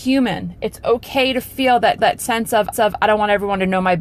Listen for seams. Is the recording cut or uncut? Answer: cut